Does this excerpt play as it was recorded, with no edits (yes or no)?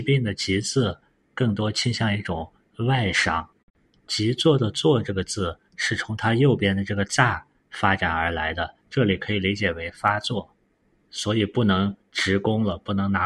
no